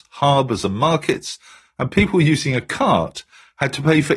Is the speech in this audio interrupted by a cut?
no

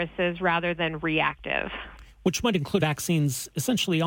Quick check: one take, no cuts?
no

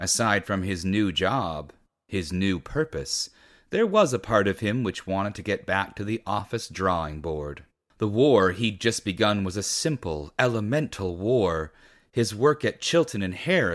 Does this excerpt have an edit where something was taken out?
no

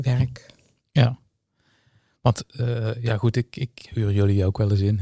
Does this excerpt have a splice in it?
no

